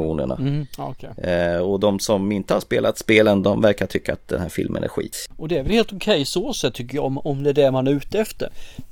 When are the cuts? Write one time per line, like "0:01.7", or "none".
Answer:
none